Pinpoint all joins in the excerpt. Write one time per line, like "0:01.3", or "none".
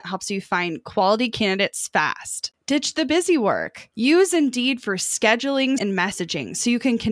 0:05.8